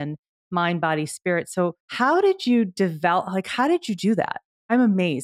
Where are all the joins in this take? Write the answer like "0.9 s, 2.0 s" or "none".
1.8 s